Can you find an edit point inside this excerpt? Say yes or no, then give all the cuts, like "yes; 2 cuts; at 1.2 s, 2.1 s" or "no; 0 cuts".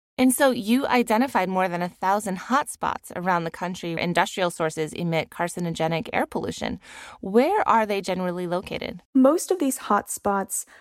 yes; 2 cuts; at 4.0 s, 9.0 s